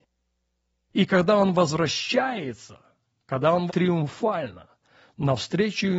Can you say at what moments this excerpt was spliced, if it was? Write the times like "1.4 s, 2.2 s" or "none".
3.7 s